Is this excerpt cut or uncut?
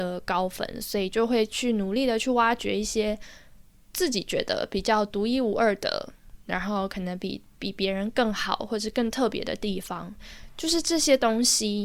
uncut